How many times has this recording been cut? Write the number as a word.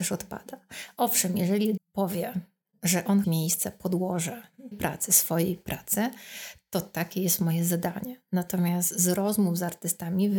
three